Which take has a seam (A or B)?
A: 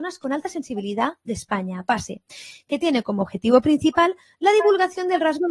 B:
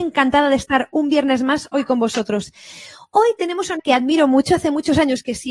B